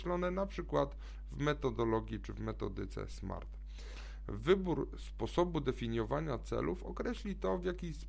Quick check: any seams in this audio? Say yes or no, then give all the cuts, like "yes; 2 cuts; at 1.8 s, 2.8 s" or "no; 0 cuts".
no; 0 cuts